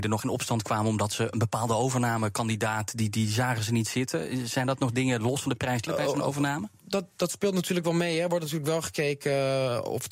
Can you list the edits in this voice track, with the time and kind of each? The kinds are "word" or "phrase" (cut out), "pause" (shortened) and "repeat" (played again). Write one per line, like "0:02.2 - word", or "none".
0:05.9 - phrase